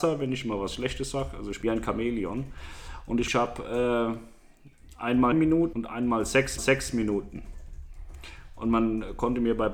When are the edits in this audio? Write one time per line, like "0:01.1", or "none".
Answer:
0:01.6
0:03.3
0:05.3
0:05.7
0:06.6